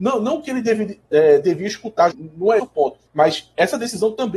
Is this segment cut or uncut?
cut